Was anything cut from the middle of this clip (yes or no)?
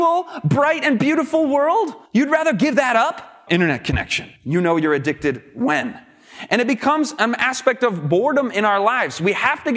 yes